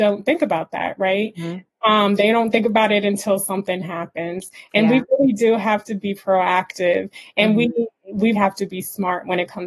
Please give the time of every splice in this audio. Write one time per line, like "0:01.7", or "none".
0:08.3